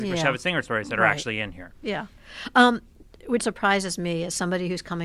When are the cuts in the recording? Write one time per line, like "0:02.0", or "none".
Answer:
0:03.4